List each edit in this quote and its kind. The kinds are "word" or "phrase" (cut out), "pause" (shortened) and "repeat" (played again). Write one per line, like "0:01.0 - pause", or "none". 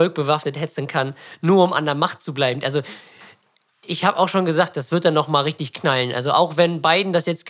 none

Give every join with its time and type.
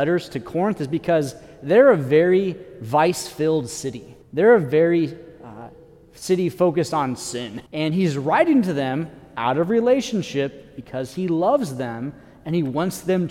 0:04.2 - pause
0:07.7 - pause

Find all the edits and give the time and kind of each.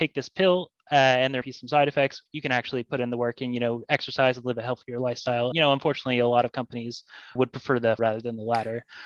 0:01.4 - word
0:02.3 - word
0:05.5 - word
0:07.4 - word
0:08.0 - word

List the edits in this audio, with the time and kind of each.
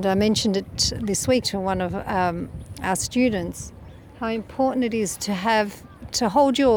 0:01.4 - word

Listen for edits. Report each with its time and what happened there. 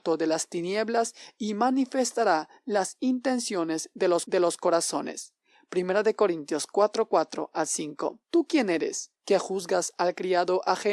0:04.2 - repeat
0:08.2 - pause
0:09.1 - pause

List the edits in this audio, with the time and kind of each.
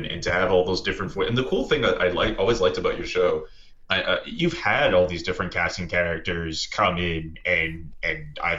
none

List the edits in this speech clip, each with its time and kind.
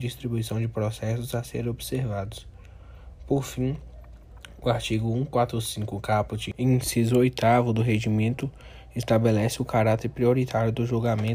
none

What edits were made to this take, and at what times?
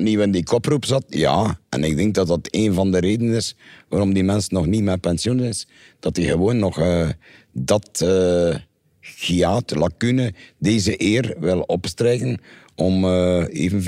none

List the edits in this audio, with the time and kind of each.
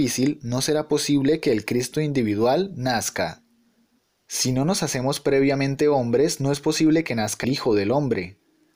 0:07.4 - word

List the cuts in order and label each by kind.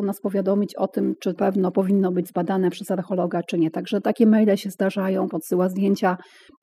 0:01.4 - phrase
0:05.3 - word

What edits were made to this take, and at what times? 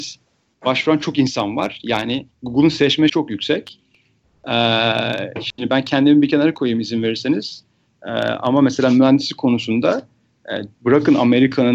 0:02.3 - pause
0:03.1 - word
0:10.7 - pause

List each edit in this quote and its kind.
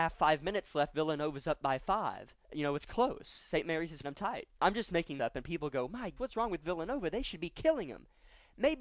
0:02.4 - pause
0:04.0 - word
0:05.2 - word
0:06.2 - word

